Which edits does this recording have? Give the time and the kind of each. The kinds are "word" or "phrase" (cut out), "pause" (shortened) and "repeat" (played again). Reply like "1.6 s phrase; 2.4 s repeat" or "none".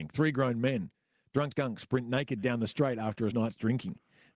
1.5 s word; 3.3 s word